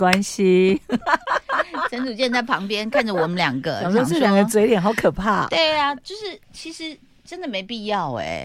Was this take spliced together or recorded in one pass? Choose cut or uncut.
uncut